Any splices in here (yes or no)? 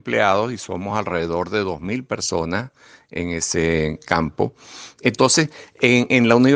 no